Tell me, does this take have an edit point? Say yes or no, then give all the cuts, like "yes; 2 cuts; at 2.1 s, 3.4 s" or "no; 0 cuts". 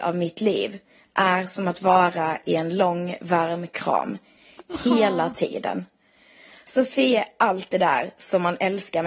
no; 0 cuts